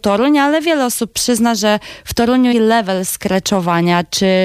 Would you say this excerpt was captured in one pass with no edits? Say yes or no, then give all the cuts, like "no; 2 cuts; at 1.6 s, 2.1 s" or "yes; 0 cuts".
no; 1 cut; at 2.5 s